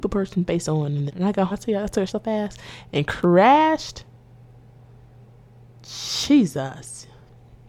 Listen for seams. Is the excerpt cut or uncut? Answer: cut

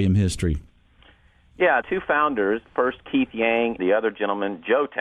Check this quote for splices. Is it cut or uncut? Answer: cut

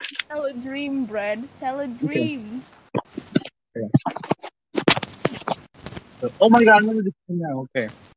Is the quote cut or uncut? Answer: uncut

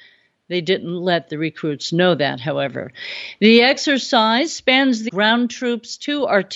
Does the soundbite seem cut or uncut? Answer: cut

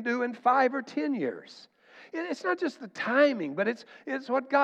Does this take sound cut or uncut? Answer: uncut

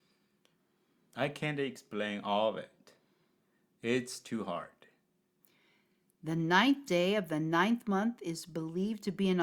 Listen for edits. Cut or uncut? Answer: uncut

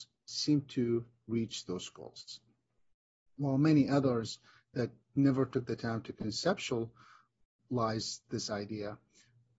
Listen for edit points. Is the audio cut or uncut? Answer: uncut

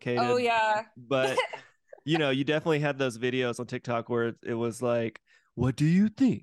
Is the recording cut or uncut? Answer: uncut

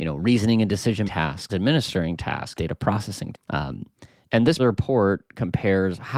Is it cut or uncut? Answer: cut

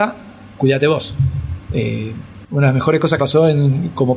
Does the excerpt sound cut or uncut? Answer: cut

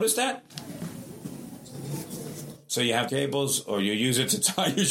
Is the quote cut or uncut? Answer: cut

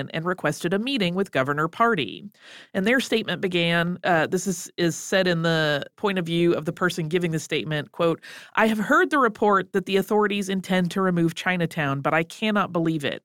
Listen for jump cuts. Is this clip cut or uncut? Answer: uncut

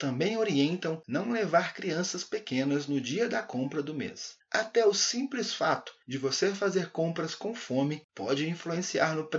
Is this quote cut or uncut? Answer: uncut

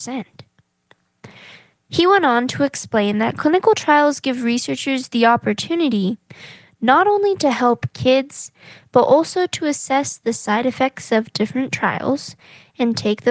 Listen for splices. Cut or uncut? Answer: uncut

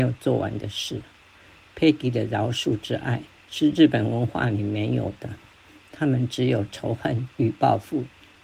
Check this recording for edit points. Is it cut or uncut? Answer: cut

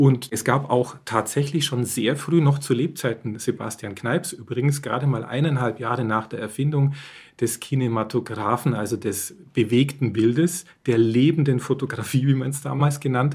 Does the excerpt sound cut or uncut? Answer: uncut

